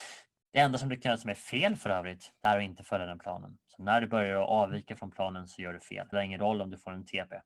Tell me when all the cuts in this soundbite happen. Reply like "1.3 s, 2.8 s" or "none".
6.1 s